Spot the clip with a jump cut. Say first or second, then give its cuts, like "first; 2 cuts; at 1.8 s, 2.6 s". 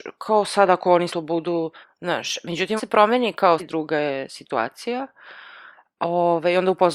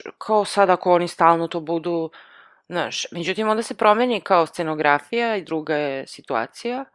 first; 4 cuts; at 1.1 s, 1.8 s, 2.8 s, 3.6 s